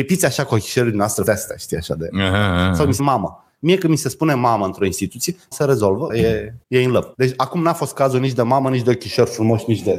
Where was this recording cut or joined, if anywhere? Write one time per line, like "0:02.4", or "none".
0:01.3
0:03.0
0:05.5
0:06.1
0:06.6
0:07.1